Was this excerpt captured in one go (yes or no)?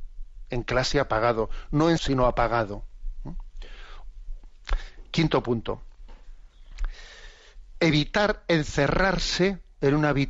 no